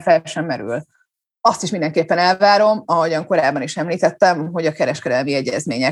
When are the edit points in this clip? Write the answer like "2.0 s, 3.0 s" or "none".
none